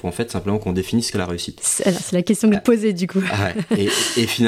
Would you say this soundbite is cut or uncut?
cut